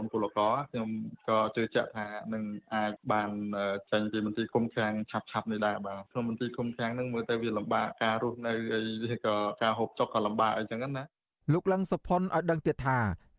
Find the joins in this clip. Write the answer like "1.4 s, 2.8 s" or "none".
none